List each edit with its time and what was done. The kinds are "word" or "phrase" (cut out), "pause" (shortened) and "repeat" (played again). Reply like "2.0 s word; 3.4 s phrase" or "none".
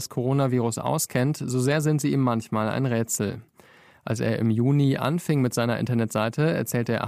none